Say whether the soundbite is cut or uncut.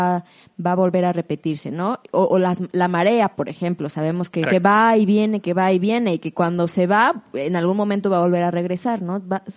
cut